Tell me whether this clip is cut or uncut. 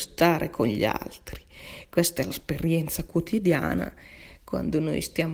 cut